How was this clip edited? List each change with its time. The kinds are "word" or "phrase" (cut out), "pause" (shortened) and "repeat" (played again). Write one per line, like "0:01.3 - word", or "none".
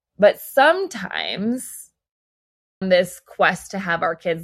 0:02.8 - word